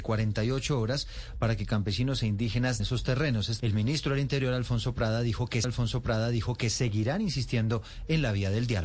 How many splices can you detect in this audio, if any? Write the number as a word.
three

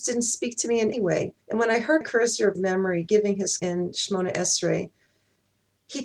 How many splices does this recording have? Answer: five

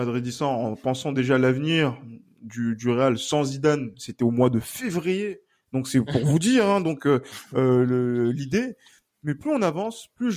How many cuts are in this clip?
zero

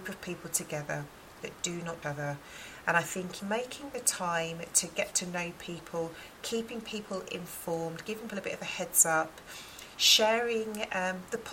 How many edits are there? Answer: three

